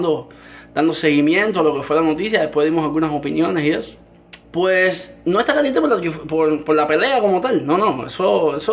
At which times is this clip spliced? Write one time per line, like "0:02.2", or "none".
0:04.4